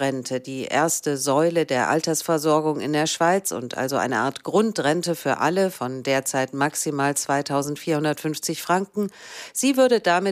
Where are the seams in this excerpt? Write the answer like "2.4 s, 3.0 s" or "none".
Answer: none